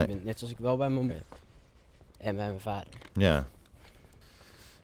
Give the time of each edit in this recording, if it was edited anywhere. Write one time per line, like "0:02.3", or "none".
0:01.1
0:03.1